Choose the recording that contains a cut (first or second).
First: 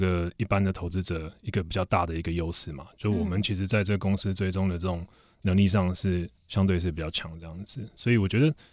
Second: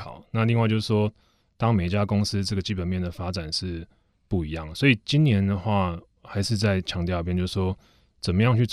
first